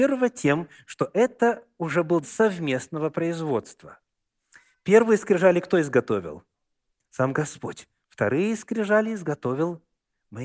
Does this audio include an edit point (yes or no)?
yes